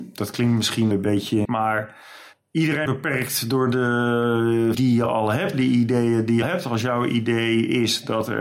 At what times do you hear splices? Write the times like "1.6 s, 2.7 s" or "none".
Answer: 0.9 s, 1.4 s, 2.9 s, 4.7 s, 5.5 s, 6.4 s